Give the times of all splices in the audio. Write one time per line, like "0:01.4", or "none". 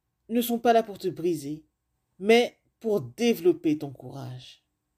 0:01.9